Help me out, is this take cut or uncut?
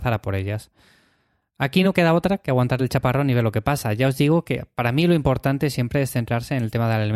uncut